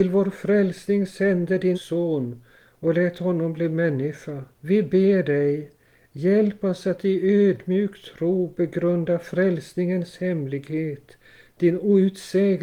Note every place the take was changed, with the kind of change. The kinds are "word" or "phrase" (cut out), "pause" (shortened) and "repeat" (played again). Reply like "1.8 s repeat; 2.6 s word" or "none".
1.7 s word; 4.5 s pause